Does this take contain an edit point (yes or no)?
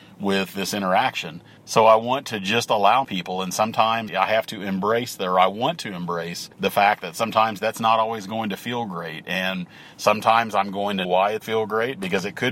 yes